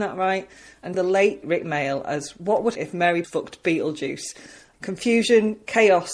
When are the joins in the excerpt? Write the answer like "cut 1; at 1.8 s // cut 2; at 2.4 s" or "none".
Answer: cut 1; at 0.9 s // cut 2; at 1.4 s // cut 3; at 2.8 s // cut 4; at 3.2 s // cut 5; at 4.7 s